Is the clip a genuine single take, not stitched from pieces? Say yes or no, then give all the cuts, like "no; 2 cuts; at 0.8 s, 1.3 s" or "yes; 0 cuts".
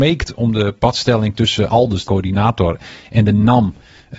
no; 2 cuts; at 1.7 s, 2.1 s